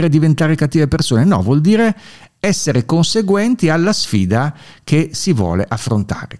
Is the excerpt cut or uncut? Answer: uncut